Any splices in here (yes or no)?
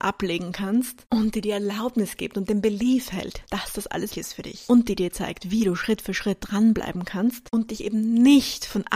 yes